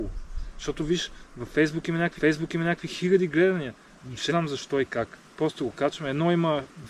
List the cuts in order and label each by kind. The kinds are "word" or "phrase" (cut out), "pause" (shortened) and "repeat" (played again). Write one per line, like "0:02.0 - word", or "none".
0:02.2 - repeat
0:04.3 - word
0:05.3 - pause